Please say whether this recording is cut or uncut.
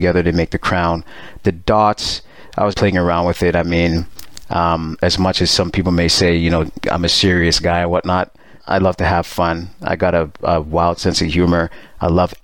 cut